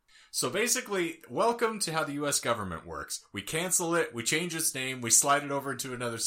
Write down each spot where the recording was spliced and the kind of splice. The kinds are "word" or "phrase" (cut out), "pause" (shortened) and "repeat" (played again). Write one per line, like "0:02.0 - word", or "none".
none